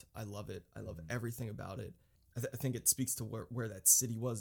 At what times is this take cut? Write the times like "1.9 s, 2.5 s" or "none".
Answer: none